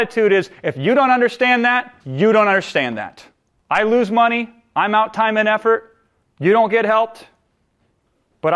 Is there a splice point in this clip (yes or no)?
yes